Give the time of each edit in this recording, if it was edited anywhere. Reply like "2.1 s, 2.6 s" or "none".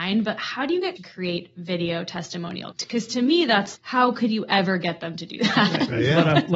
1.0 s, 2.7 s, 3.8 s